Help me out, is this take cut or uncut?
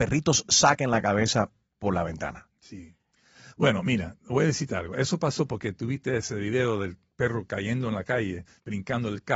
uncut